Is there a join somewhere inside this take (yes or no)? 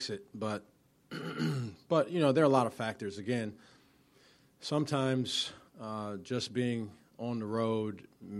yes